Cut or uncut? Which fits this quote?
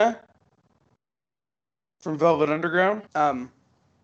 cut